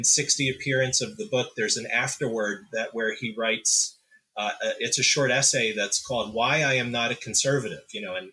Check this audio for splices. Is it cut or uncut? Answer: uncut